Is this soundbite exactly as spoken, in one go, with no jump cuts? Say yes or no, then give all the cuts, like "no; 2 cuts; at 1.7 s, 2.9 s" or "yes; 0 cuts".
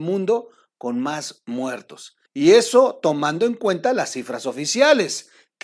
no; 1 cut; at 2.3 s